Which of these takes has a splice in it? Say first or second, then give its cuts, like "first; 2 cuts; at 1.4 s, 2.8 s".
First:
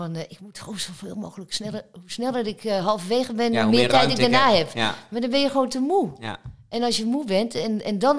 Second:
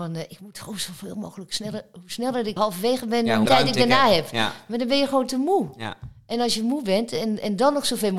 second; 2 cuts; at 2.6 s, 3.5 s